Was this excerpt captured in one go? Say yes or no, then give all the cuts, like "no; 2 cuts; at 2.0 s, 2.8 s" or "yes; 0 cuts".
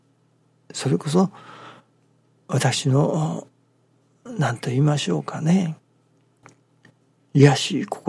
yes; 0 cuts